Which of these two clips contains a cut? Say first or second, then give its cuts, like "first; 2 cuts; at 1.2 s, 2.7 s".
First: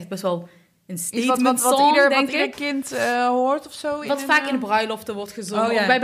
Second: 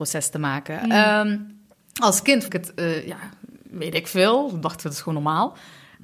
second; 1 cut; at 2.5 s